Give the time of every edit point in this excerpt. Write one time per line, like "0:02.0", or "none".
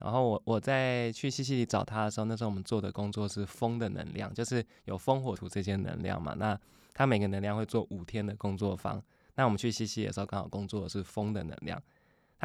0:05.4